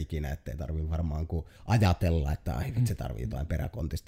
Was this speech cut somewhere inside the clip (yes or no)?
yes